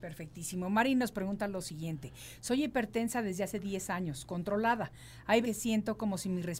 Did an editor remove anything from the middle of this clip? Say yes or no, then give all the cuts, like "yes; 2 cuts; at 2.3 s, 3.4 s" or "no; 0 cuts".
yes; 1 cut; at 5.4 s